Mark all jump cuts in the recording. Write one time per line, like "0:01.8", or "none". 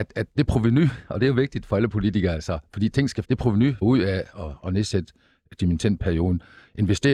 0:03.2
0:03.8